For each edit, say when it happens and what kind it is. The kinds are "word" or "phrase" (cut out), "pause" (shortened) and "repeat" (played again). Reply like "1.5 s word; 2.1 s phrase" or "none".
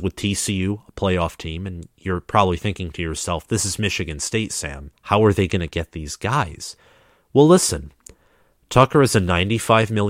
4.9 s pause